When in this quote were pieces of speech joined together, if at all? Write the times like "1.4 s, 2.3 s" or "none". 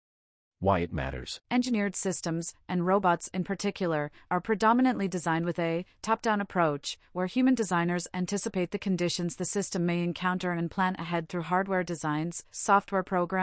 1.4 s